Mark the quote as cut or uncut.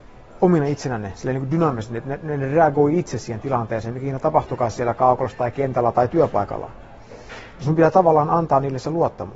uncut